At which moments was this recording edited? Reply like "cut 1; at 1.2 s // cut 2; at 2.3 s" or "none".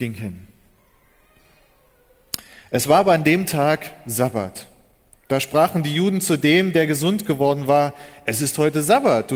none